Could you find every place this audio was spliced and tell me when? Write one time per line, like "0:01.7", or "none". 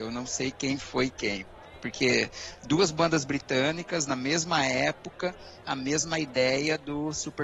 0:05.6

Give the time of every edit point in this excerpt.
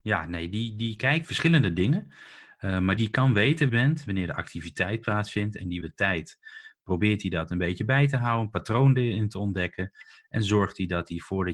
0:01.2
0:03.0
0:03.7
0:05.8

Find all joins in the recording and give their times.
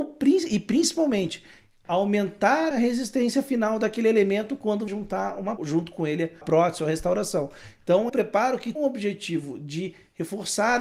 0:02.7
0:04.9
0:05.6
0:06.4
0:08.1
0:08.8

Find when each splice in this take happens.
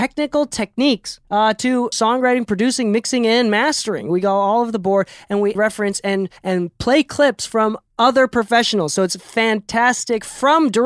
0:01.2
0:01.9
0:05.5
0:06.4

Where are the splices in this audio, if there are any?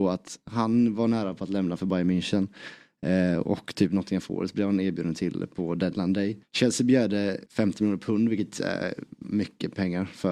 0:06.4
0:07.5

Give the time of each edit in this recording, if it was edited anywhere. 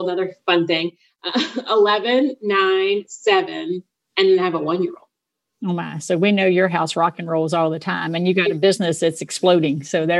none

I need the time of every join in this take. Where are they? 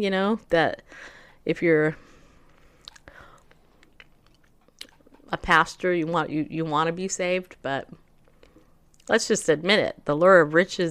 none

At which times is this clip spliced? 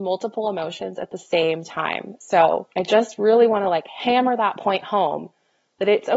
0:02.7

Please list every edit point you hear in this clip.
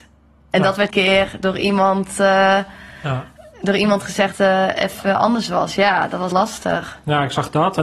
0:00.9
0:04.3
0:06.3

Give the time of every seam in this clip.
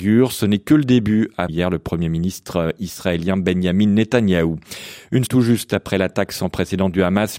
0:01.5
0:05.3

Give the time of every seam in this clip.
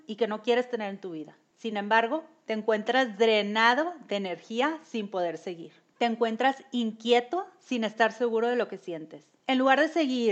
none

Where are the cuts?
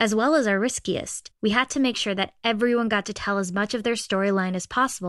0:01.3

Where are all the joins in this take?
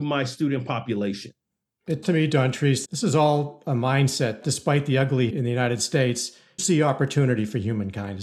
0:02.0
0:02.8
0:04.4
0:05.3
0:06.6

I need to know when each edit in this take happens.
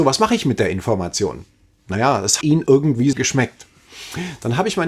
0:02.4
0:03.1

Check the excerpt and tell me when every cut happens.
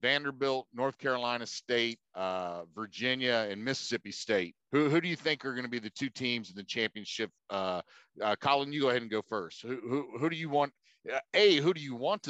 0:02.1
0:04.6
0:07.4

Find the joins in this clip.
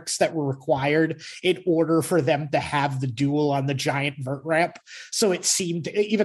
none

